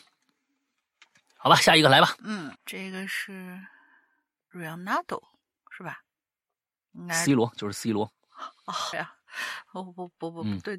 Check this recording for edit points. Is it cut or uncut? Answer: cut